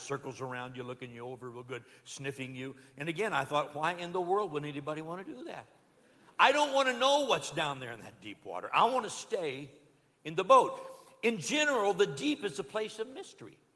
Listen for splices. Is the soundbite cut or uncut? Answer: uncut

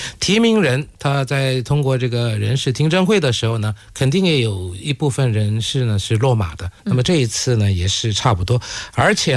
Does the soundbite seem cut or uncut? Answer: cut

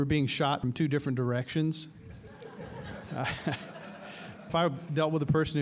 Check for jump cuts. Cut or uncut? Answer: cut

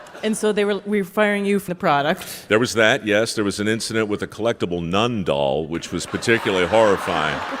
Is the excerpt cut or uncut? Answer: cut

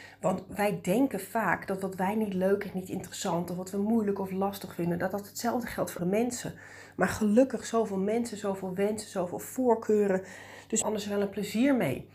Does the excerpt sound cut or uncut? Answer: cut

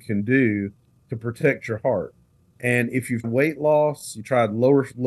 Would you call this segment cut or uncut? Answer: cut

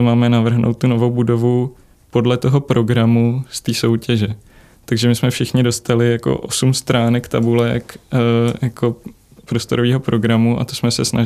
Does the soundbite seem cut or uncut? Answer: uncut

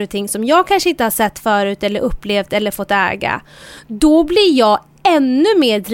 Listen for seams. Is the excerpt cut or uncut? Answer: uncut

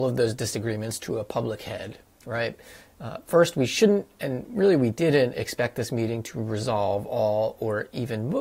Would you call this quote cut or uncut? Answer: uncut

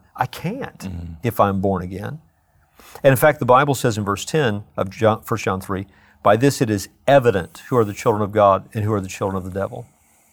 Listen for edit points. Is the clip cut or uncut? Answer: uncut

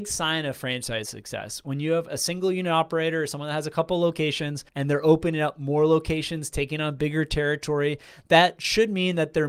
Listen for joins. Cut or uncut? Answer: cut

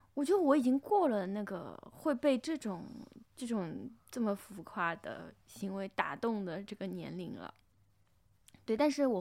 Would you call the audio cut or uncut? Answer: cut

